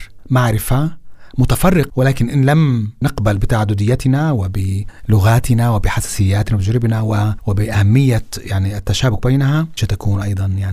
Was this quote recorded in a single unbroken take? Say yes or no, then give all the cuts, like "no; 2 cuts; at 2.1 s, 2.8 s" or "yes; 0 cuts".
no; 2 cuts; at 1.9 s, 9.8 s